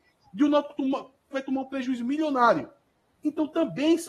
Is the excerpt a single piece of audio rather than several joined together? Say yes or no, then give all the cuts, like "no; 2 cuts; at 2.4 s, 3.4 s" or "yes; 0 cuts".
no; 1 cut; at 1.3 s